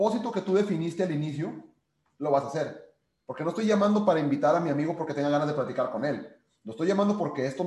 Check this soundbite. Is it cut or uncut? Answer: uncut